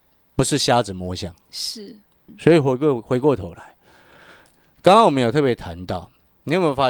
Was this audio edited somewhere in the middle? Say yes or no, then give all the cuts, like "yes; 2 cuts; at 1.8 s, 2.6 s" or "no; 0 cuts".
no; 0 cuts